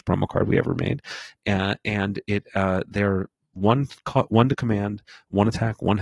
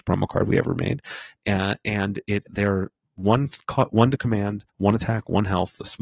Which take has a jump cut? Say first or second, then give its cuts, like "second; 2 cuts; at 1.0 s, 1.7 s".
second; 2 cuts; at 2.5 s, 4.7 s